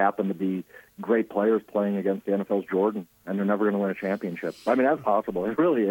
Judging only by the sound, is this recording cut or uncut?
uncut